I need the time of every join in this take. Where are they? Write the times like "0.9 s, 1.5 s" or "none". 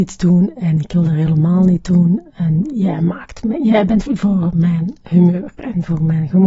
4.1 s